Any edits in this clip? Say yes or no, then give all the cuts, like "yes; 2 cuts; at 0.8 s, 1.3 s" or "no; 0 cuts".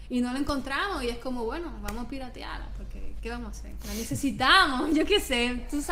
no; 0 cuts